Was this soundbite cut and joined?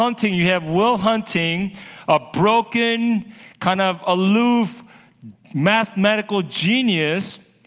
no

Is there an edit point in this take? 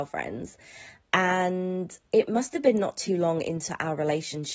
no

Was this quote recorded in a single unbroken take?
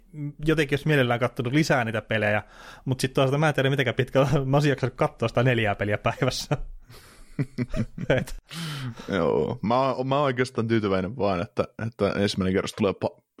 yes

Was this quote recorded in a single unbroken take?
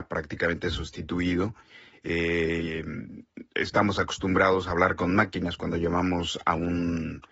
yes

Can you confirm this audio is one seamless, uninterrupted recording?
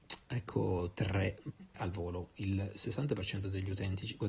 no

